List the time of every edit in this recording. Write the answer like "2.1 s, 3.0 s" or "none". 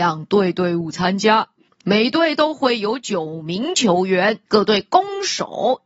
1.7 s, 4.5 s